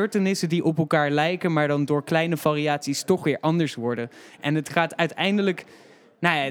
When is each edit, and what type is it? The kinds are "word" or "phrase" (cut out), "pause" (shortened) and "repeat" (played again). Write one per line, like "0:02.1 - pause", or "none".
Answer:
none